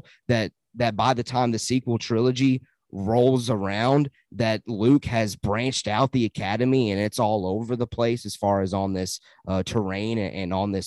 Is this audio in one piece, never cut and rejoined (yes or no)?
yes